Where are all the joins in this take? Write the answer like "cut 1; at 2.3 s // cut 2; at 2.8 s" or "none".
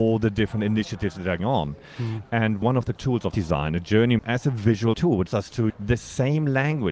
cut 1; at 1.4 s // cut 2; at 2.6 s // cut 3; at 3.0 s // cut 4; at 3.3 s // cut 5; at 4.2 s // cut 6; at 4.9 s // cut 7; at 5.3 s // cut 8; at 5.7 s